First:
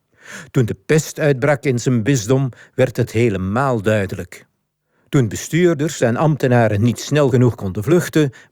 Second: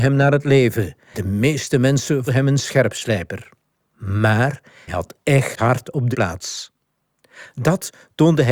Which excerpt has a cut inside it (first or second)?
second